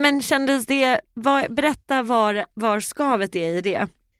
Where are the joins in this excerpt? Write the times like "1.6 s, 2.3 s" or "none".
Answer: none